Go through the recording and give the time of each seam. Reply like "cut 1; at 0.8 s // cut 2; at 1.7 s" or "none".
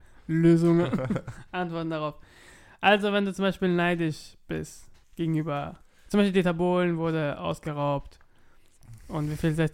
cut 1; at 5.0 s